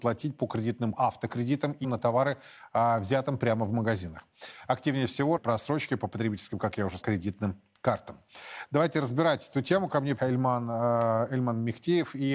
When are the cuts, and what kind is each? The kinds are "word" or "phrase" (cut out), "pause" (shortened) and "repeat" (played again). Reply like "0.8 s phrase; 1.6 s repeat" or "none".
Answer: 0.9 s word; 1.8 s word; 5.4 s word; 6.6 s word; 7.0 s word; 10.2 s word